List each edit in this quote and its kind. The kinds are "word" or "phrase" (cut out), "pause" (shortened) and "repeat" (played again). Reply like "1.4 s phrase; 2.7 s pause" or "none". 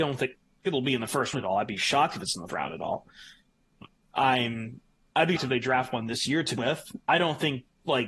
1.3 s word; 2.5 s word; 5.4 s word; 6.6 s word